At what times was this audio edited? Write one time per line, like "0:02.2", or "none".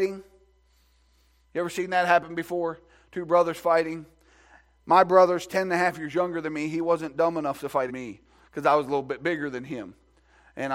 0:07.9